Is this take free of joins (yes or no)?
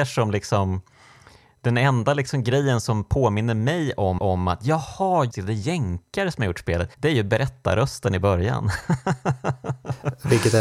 no